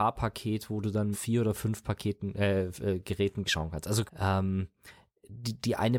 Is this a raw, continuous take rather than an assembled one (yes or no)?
no